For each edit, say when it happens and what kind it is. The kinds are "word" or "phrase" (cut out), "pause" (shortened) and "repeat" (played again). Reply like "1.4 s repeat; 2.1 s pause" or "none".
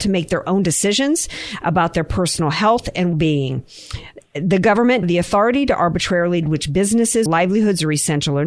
3.1 s word; 5.0 s phrase; 6.4 s word; 7.3 s word